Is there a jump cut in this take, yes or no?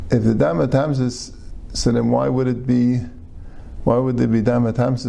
no